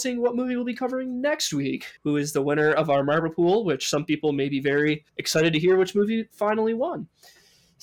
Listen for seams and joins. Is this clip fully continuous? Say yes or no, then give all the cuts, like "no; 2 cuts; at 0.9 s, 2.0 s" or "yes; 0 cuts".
no; 2 cuts; at 2.0 s, 5.1 s